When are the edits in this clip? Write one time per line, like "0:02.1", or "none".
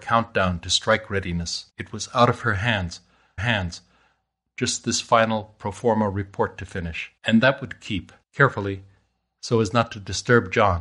0:01.7
0:03.4
0:07.2
0:08.2